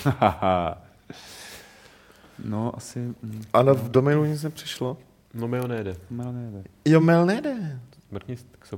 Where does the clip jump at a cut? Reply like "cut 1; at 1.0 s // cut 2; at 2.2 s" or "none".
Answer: none